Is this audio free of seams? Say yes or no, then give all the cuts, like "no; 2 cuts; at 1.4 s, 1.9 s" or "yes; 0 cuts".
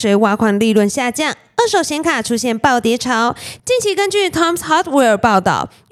yes; 0 cuts